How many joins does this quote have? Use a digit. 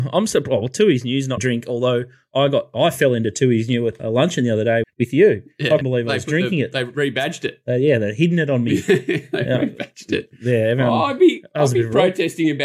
4